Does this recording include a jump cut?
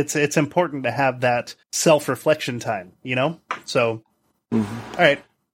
yes; 2 cuts; at 1.6 s, 4.2 s

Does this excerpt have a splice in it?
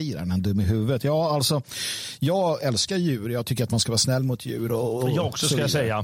no; 0 cuts

